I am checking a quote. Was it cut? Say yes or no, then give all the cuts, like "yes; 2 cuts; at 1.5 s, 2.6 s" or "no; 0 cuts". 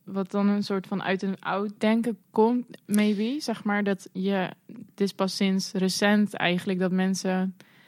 yes; 1 cut; at 2.2 s